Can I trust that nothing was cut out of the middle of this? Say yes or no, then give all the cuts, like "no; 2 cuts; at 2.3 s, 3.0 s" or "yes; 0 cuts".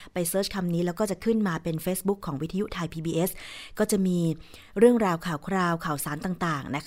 yes; 0 cuts